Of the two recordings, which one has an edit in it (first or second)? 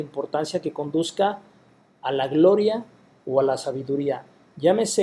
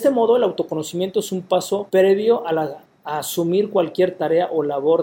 second